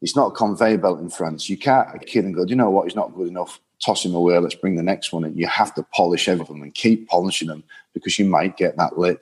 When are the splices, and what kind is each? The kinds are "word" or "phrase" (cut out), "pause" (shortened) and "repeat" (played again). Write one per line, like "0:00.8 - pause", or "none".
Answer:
0:02.0 - word
0:06.4 - phrase

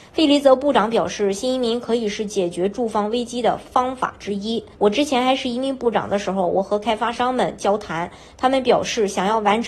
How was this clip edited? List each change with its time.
0:04.7 - pause

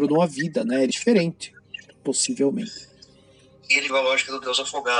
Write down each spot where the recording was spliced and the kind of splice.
0:00.9 - phrase
0:03.9 - word

